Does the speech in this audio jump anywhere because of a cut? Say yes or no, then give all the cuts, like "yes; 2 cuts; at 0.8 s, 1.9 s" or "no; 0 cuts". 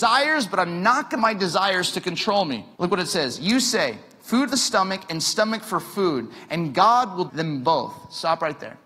yes; 4 cuts; at 1.2 s, 2.7 s, 4.5 s, 7.3 s